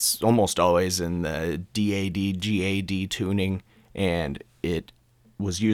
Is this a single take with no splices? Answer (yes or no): yes